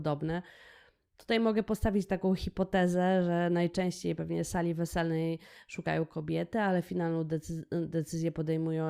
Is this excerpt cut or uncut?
uncut